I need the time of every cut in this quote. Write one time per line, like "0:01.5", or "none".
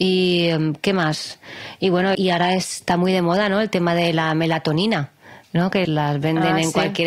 0:02.1
0:05.8